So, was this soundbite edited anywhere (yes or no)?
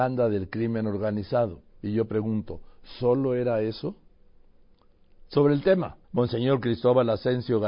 yes